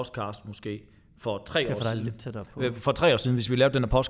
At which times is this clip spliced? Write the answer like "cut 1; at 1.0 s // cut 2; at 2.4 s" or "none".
none